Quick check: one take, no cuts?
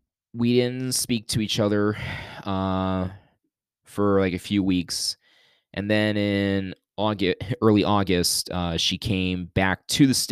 yes; 0 cuts

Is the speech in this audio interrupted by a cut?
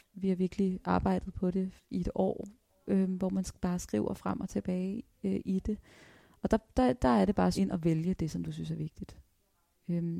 yes; 1 cut; at 7.5 s

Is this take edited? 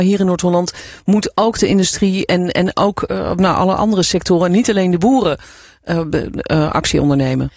no; 0 cuts

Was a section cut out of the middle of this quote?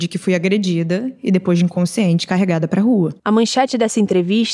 yes; 1 cut; at 3.2 s

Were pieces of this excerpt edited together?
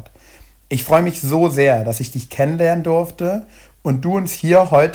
no; 0 cuts

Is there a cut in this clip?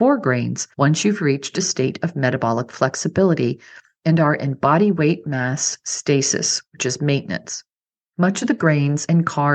no; 0 cuts

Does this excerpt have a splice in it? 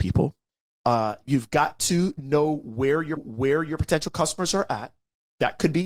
yes; 1 cut; at 3.2 s

